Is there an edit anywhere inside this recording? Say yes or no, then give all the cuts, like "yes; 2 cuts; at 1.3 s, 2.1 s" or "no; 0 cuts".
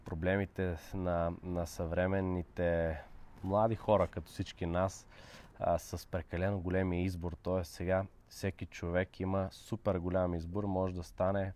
no; 0 cuts